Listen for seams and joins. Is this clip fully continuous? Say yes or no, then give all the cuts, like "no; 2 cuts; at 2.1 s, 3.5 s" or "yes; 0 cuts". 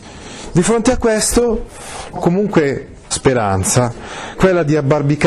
no; 3 cuts; at 2.1 s, 3.1 s, 4.4 s